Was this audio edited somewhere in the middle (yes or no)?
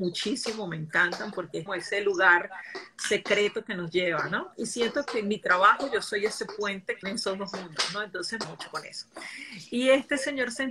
yes